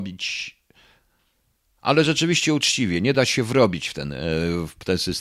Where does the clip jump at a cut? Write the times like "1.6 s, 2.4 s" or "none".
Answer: none